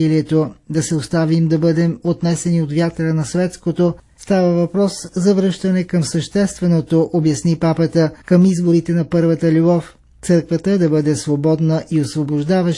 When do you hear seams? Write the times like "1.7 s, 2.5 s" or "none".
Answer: 8.2 s